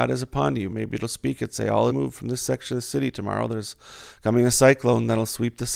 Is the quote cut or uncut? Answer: cut